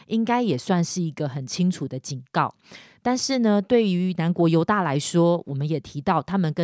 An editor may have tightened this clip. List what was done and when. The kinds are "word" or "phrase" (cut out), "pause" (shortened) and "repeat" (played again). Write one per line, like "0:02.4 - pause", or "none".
none